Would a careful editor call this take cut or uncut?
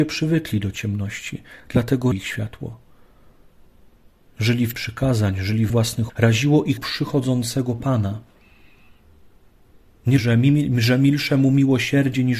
cut